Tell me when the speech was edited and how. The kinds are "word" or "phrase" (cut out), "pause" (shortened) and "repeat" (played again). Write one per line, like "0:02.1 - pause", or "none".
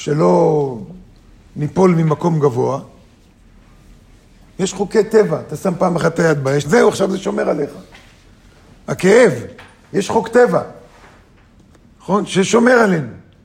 0:06.6 - word